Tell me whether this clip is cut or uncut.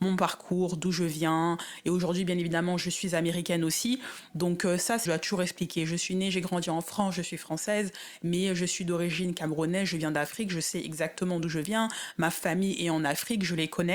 cut